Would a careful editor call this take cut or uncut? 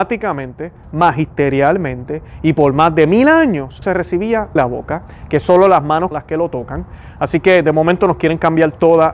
cut